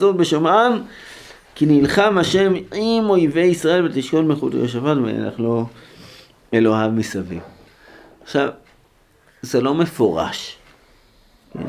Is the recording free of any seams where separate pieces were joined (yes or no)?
yes